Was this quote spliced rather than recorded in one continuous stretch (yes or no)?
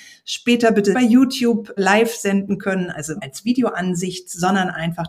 yes